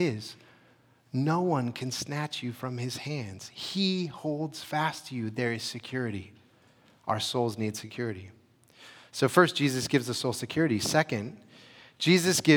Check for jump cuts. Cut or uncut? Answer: uncut